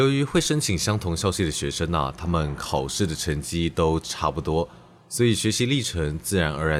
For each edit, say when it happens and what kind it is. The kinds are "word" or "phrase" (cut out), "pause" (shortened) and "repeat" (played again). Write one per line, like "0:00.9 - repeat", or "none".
none